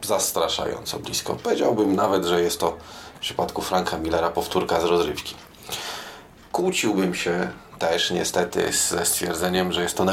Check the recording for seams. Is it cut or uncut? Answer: uncut